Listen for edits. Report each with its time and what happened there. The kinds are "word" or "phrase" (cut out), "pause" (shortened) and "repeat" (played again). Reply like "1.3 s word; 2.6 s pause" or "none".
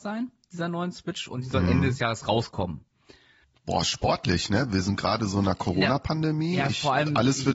3.4 s pause

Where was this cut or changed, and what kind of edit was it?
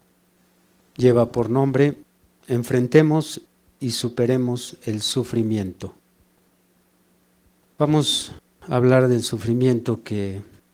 none

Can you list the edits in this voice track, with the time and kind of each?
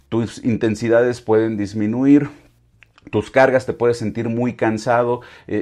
none

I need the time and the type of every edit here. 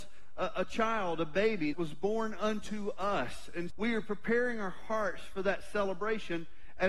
1.7 s phrase; 3.7 s word

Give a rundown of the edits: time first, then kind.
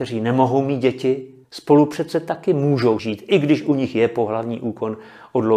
1.4 s pause; 3.0 s word

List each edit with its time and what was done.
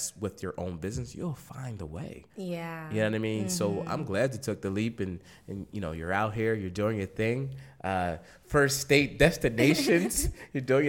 2.3 s pause

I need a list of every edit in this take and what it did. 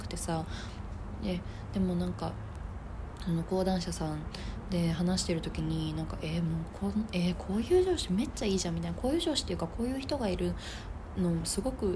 none

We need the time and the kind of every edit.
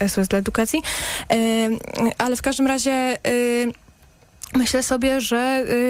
none

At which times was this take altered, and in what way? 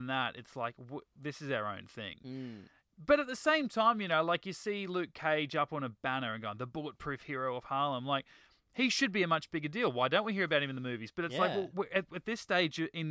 none

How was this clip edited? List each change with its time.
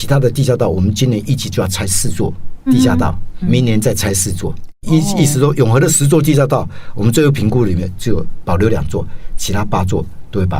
2.7 s word; 3.4 s word; 4.8 s pause

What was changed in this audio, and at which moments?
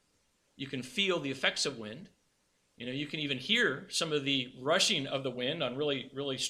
none

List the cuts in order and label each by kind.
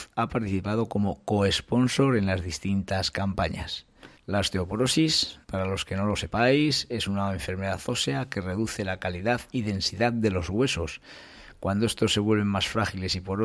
4.2 s pause; 5.4 s pause

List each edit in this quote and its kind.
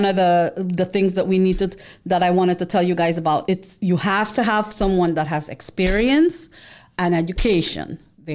3.5 s word

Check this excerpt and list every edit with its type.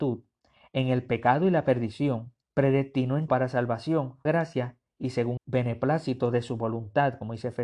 2.4 s pause; 3.3 s word; 4.3 s phrase; 5.4 s word

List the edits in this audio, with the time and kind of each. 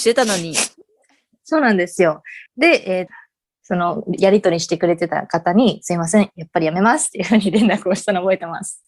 2.5 s pause; 3.1 s phrase

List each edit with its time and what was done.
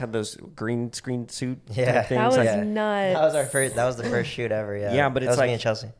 1.6 s pause

